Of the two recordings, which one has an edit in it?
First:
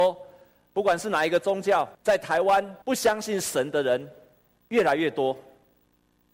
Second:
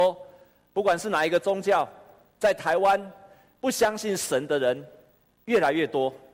first; 2 cuts; at 1.9 s, 2.8 s

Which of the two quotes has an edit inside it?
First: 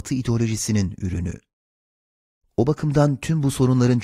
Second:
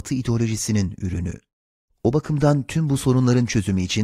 second; 1 cut; at 1.5 s

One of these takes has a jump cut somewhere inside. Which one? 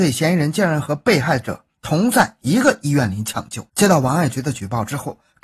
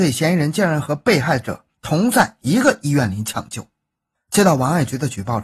first; 1 cut; at 3.7 s

